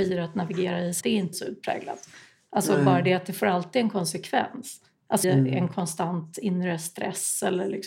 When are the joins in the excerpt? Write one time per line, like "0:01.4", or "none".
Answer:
0:01.0
0:01.3
0:05.2